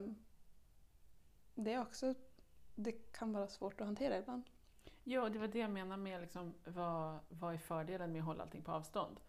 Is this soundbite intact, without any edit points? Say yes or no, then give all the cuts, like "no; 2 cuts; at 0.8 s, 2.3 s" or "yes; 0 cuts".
yes; 0 cuts